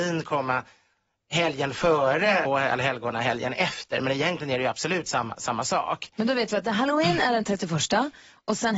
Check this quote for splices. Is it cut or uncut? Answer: cut